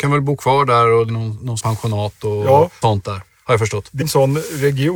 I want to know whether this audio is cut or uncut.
cut